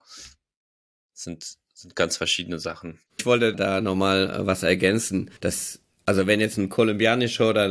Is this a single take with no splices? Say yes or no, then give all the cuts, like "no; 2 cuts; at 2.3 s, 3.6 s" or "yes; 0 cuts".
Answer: no; 3 cuts; at 3.1 s, 3.5 s, 5.4 s